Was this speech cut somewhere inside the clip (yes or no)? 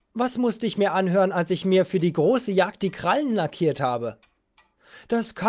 no